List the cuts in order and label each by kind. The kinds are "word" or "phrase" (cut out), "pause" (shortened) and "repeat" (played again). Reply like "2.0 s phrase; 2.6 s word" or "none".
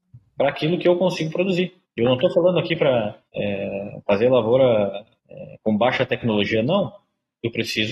1.8 s pause; 3.3 s pause; 5.2 s pause